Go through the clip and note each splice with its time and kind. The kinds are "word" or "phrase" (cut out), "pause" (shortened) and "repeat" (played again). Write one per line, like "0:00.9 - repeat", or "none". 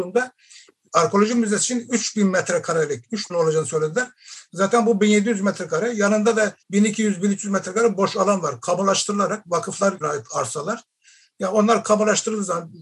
0:03.3 - phrase
0:06.6 - pause
0:10.0 - phrase